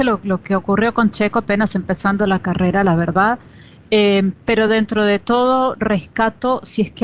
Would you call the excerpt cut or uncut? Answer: uncut